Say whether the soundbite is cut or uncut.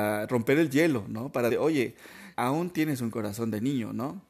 cut